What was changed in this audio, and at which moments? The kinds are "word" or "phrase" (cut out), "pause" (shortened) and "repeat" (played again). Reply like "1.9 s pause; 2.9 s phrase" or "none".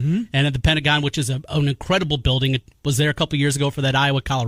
none